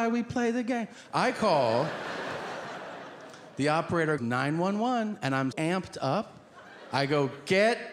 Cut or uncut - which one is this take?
cut